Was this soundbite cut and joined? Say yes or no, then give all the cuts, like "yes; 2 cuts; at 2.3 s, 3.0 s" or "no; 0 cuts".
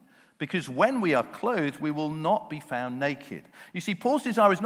no; 0 cuts